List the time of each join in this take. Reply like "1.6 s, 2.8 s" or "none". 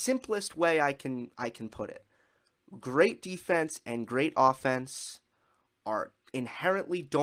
none